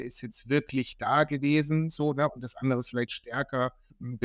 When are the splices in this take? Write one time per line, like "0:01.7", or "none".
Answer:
none